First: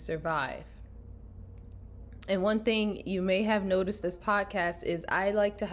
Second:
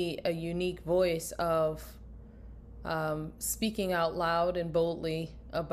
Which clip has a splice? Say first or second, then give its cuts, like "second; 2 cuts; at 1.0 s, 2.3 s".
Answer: first; 1 cut; at 4.0 s